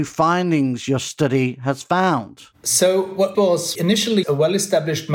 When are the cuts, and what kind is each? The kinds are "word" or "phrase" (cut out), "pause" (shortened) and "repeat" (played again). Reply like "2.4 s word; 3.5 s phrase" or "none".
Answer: 2.5 s pause; 3.3 s phrase; 3.7 s word; 4.2 s word